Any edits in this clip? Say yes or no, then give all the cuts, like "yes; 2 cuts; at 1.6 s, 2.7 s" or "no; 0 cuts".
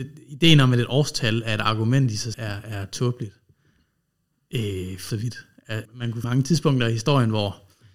yes; 4 cuts; at 2.3 s, 5.1 s, 5.8 s, 6.2 s